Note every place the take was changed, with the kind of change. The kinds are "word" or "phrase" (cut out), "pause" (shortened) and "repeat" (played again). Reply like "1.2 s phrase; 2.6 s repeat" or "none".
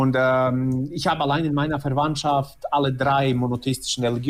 none